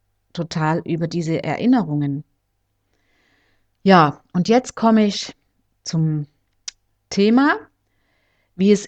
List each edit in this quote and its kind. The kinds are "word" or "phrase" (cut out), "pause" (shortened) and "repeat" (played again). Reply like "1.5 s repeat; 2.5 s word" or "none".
none